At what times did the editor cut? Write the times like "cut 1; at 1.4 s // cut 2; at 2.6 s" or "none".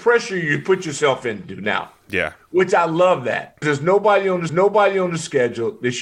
cut 1; at 3.6 s // cut 2; at 4.5 s

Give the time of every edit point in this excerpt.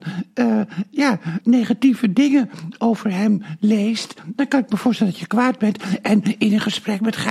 cut 1; at 1.4 s

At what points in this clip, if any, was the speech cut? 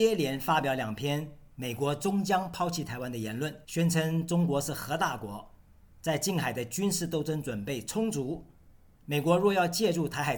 cut 1; at 3.6 s

